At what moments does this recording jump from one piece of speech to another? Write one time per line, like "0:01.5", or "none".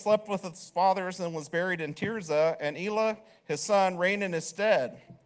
none